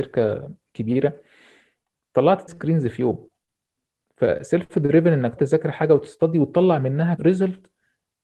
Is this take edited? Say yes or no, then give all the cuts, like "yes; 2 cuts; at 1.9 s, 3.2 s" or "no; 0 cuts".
yes; 3 cuts; at 2.5 s, 5.4 s, 7.2 s